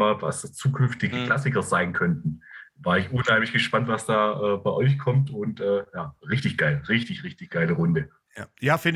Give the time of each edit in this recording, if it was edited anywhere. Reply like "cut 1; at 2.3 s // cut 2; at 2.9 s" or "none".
none

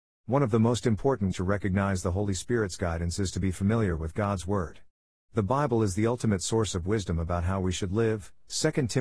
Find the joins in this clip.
cut 1; at 1.3 s

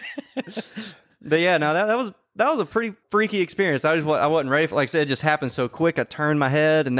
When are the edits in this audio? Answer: cut 1; at 3.0 s

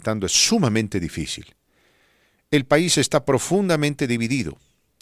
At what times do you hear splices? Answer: none

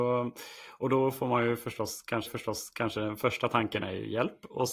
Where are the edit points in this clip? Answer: cut 1; at 2.3 s

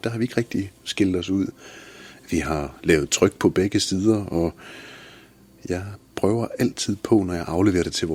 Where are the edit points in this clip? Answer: none

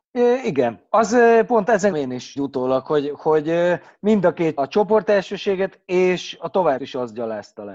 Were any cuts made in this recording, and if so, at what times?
cut 1; at 1.9 s // cut 2; at 2.4 s // cut 3; at 4.6 s // cut 4; at 6.8 s

